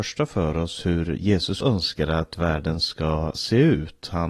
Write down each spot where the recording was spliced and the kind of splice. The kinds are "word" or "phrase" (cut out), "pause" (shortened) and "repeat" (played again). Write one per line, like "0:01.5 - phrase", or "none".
0:01.6 - word